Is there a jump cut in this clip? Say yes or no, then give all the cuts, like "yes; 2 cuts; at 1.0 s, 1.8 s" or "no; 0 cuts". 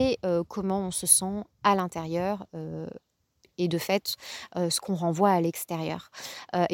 no; 0 cuts